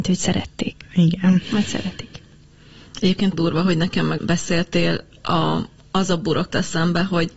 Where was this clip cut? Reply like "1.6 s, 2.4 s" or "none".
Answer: 3.3 s, 4.2 s, 6.5 s